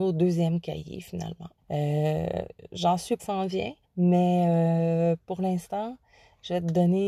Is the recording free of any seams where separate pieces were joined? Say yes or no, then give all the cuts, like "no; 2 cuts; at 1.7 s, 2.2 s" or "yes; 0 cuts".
no; 3 cuts; at 1.6 s, 3.2 s, 3.8 s